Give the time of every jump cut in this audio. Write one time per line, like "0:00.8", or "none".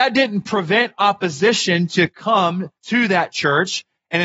0:02.8

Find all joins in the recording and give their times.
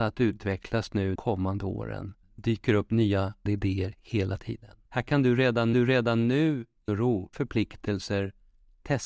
0:01.2
0:02.2
0:03.5
0:04.9
0:05.7
0:06.9
0:07.3

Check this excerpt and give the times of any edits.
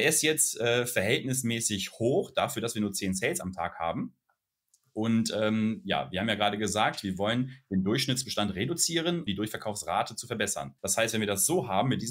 0:09.3
0:10.8

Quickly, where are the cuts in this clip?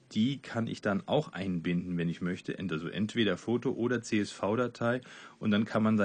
none

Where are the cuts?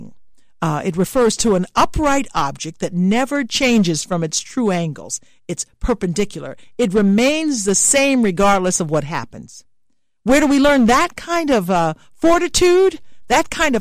none

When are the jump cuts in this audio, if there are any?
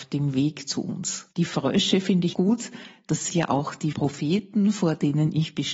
0:01.3
0:02.3
0:03.3
0:03.9

